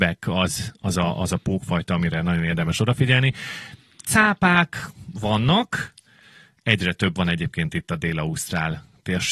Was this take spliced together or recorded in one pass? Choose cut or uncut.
uncut